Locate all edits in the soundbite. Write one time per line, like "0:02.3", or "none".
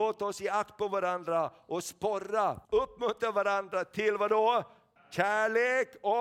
0:02.6
0:05.0